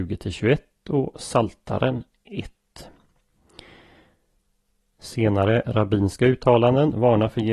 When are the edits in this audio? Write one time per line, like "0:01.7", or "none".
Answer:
none